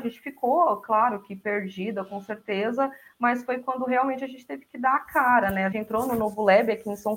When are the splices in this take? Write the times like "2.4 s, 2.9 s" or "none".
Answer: 5.7 s